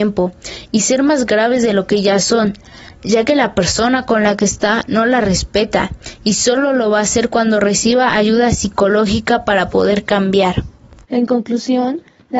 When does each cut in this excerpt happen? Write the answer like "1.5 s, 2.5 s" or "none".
11.0 s